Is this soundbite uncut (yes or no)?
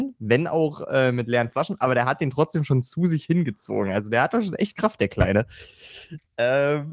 yes